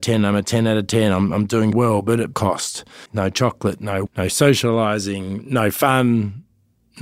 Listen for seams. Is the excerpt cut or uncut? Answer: cut